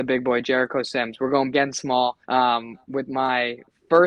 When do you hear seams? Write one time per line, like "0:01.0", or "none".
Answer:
0:01.5
0:02.2